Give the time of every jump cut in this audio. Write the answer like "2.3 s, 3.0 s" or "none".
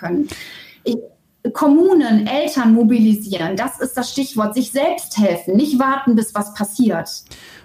none